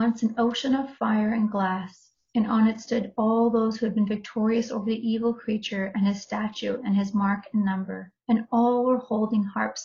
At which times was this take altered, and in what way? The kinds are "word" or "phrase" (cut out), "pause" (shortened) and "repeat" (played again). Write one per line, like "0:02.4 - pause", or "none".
0:08.2 - pause

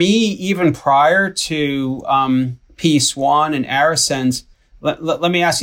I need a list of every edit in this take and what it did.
0:02.6 - pause

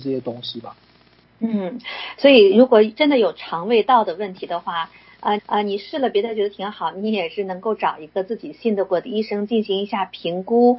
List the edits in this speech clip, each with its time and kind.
0:05.4 - repeat

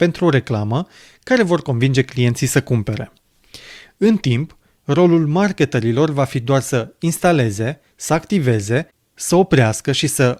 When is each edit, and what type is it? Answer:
none

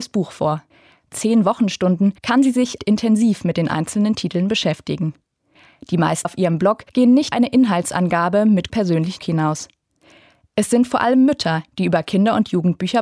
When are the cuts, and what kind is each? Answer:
0:01.1 - phrase
0:02.2 - pause
0:02.8 - phrase
0:06.2 - word
0:06.9 - pause
0:07.3 - word
0:08.7 - word
0:09.2 - word

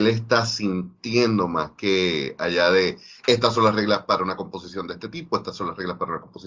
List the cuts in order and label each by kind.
none

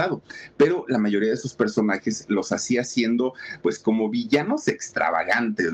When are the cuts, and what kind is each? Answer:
none

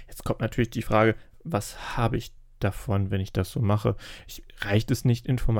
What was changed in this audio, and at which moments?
none

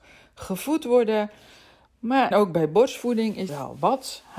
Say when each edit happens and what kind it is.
0:02.3 - word
0:03.5 - word

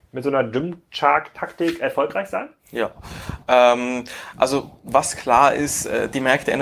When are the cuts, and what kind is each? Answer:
none

